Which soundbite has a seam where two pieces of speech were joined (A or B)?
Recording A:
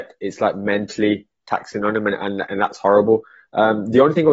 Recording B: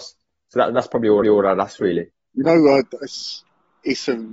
B